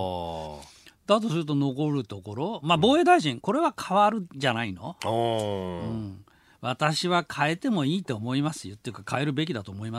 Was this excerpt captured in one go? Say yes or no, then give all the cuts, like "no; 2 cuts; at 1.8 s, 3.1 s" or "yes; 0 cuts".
yes; 0 cuts